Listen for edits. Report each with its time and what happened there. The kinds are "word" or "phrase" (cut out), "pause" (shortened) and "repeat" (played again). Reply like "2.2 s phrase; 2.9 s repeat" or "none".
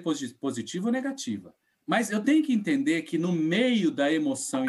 1.7 s pause